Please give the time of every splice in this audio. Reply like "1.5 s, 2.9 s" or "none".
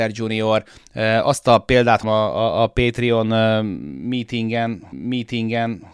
2.0 s, 4.9 s